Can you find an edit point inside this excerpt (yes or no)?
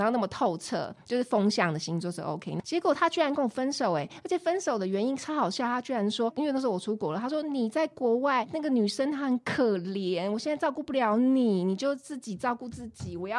no